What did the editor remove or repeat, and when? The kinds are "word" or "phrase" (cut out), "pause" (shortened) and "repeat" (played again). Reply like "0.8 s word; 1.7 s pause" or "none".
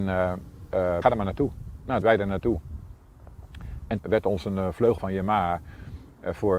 1.0 s phrase; 2.0 s word; 4.0 s word; 5.0 s word